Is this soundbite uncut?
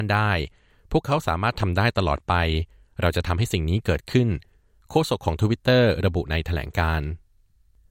yes; 0 cuts

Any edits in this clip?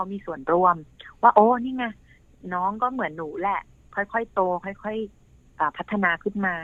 yes; 1 cut; at 5.1 s

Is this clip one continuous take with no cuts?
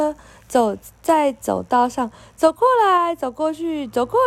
yes; 0 cuts

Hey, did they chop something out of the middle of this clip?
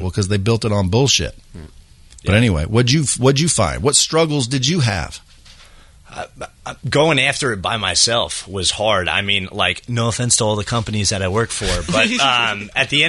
no; 0 cuts

